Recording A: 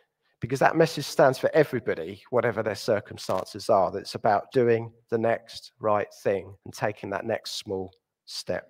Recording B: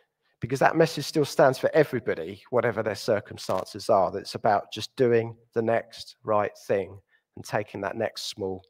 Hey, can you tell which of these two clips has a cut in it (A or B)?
A